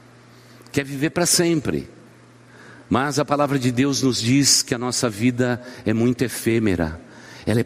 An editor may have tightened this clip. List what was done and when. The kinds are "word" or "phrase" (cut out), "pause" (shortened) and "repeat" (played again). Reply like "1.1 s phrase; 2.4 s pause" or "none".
none